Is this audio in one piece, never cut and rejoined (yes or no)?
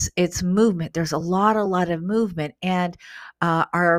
yes